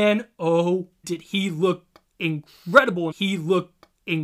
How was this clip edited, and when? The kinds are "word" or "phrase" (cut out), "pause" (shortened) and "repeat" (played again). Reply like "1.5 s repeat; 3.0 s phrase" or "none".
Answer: 1.0 s word; 3.1 s repeat